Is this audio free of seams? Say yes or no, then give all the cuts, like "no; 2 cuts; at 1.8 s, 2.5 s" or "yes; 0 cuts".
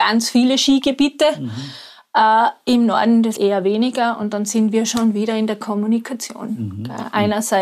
no; 1 cut; at 3.4 s